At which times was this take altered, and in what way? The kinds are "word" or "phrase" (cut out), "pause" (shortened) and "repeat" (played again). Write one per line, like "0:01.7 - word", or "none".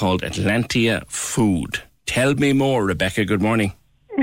none